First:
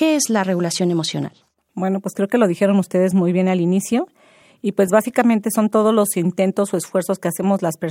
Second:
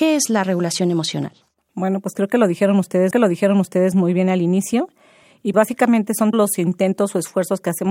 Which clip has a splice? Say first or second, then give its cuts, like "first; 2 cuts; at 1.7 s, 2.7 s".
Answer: second; 3 cuts; at 3.1 s, 5.5 s, 6.3 s